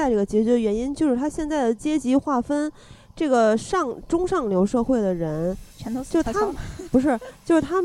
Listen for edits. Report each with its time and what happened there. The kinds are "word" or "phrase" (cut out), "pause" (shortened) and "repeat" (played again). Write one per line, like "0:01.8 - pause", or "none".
0:05.7 - pause